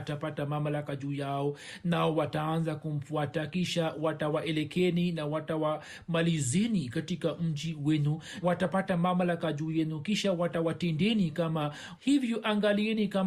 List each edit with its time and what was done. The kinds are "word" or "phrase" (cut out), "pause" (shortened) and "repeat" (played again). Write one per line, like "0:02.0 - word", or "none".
0:08.4 - word
0:12.0 - word

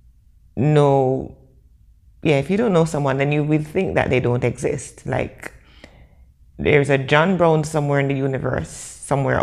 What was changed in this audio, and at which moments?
none

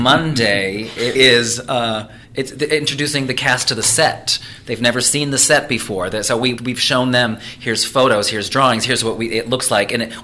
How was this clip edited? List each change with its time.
0:01.1 - word
0:02.2 - pause
0:06.6 - word

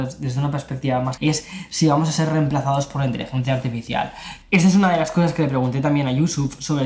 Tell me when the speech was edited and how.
0:01.2 - word

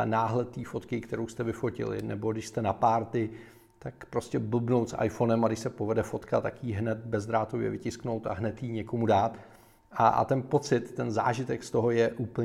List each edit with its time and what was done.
none

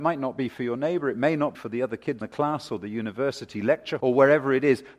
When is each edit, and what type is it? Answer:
0:01.5 - word
0:02.2 - word
0:04.0 - word

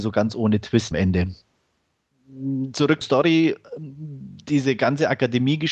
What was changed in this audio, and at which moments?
0:00.9 - word
0:03.0 - word

